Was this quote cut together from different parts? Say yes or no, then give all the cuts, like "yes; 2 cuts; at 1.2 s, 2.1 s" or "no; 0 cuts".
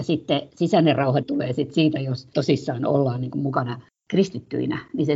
yes; 1 cut; at 1.2 s